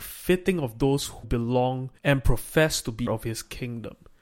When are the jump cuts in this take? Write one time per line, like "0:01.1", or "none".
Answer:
0:01.2
0:02.0
0:03.1